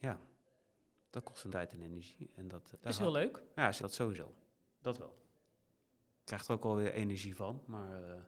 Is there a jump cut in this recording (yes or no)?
yes